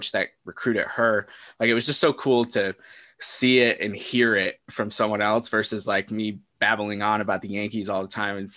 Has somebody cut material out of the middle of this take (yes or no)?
no